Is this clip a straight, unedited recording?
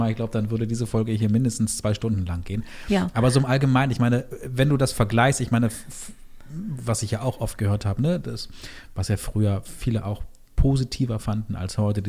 yes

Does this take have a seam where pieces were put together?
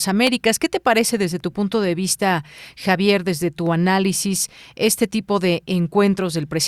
no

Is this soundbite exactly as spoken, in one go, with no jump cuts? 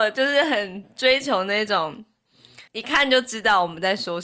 no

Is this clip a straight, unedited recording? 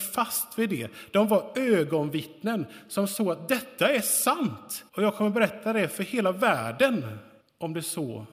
no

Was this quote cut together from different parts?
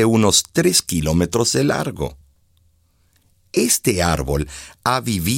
no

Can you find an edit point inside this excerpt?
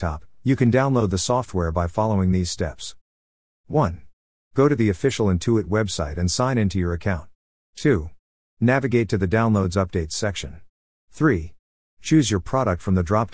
no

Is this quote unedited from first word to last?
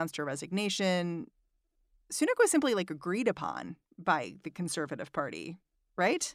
yes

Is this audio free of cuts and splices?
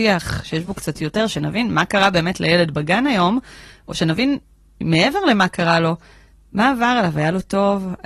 yes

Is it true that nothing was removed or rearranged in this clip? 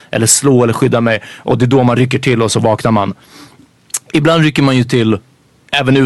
yes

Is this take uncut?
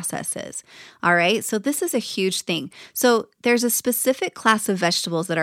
yes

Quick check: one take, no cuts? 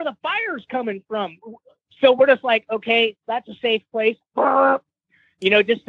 yes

